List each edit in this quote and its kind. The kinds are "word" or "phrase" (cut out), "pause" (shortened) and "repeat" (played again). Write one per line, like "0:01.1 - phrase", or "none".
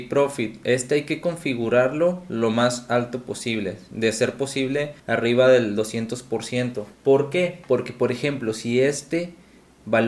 0:05.0 - pause
0:06.9 - pause